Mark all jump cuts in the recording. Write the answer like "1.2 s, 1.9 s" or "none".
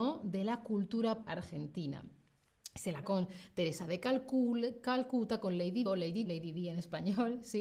1.2 s, 3.0 s, 5.9 s, 6.3 s